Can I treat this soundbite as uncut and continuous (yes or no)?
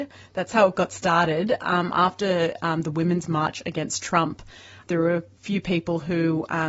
yes